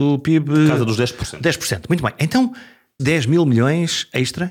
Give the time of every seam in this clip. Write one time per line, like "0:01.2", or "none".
0:03.0